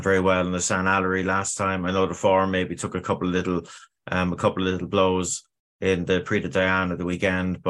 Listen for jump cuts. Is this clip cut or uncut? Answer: uncut